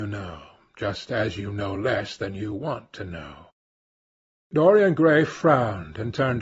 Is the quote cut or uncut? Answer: uncut